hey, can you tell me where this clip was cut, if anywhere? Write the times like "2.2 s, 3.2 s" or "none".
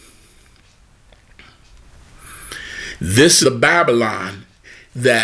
3.4 s